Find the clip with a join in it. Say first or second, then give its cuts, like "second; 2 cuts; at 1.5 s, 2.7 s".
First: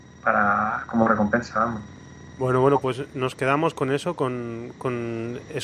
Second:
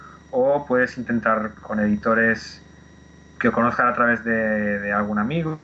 second; 1 cut; at 1.6 s